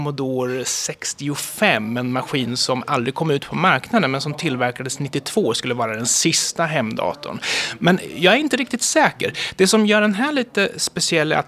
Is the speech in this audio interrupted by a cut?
no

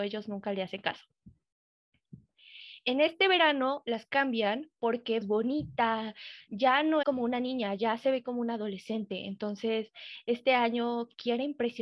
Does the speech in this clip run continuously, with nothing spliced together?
no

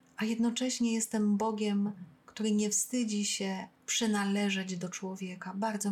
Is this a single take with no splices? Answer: no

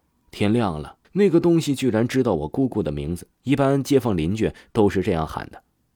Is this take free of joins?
no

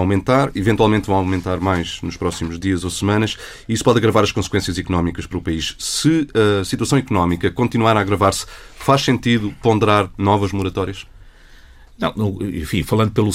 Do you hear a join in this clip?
no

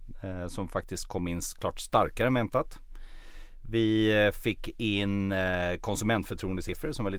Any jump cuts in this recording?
no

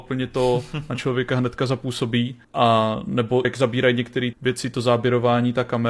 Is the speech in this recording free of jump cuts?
no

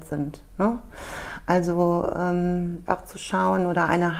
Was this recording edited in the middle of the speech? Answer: yes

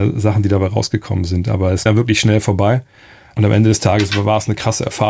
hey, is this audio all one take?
no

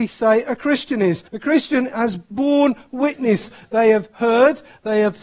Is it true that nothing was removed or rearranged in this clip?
no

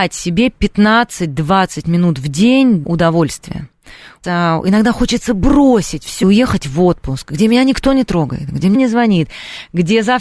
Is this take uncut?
no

